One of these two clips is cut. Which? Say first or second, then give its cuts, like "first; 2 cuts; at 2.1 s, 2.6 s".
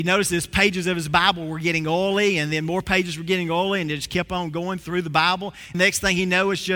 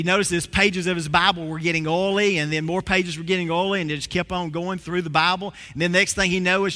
first; 1 cut; at 5.7 s